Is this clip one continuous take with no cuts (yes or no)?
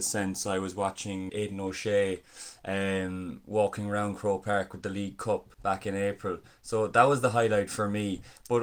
no